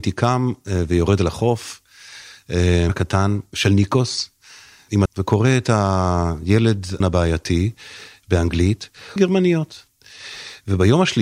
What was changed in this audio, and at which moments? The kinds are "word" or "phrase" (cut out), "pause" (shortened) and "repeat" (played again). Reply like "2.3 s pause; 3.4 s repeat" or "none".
2.9 s word; 5.1 s word; 7.0 s word; 9.2 s word